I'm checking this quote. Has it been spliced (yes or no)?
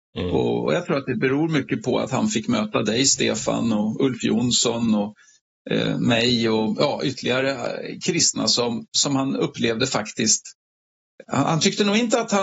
no